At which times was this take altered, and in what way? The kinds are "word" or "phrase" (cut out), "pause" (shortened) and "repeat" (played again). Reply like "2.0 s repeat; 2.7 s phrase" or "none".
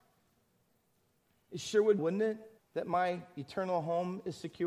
2.0 s phrase; 2.6 s pause

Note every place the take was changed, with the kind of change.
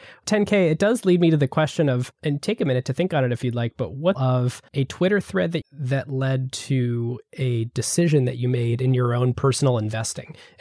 2.1 s pause; 4.1 s phrase; 4.7 s pause; 5.6 s phrase

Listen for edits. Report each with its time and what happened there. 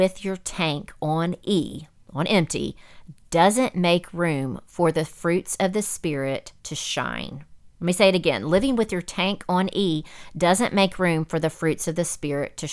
6.6 s pause; 7.7 s pause

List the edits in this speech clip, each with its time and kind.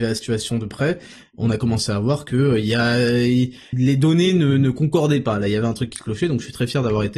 3.7 s word

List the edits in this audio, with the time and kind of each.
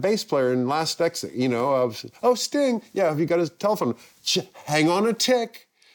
none

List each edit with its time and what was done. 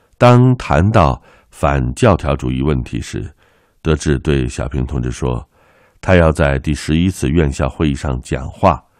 none

